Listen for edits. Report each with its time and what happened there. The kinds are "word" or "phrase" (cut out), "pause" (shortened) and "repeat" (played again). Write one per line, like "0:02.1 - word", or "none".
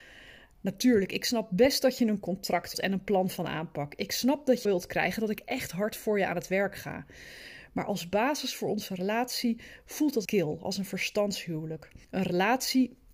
0:02.7 - word
0:04.6 - phrase
0:10.2 - word
0:12.0 - pause